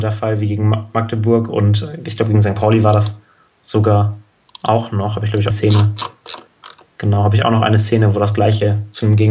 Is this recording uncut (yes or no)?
no